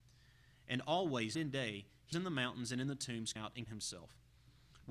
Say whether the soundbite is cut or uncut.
cut